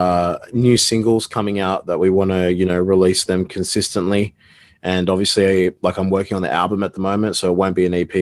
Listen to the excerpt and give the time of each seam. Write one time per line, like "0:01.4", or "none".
none